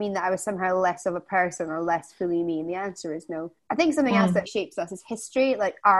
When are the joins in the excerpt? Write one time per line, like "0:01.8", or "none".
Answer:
0:03.6
0:04.5